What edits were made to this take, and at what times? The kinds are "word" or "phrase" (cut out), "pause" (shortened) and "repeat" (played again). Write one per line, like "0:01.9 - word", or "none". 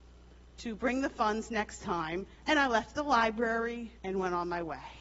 0:02.3 - pause
0:03.9 - pause